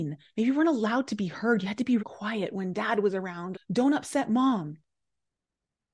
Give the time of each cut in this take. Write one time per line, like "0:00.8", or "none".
0:02.0
0:03.5